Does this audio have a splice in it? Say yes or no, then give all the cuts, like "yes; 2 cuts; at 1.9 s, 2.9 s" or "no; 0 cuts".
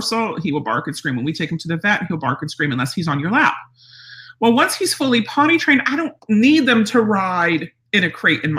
yes; 1 cut; at 6.2 s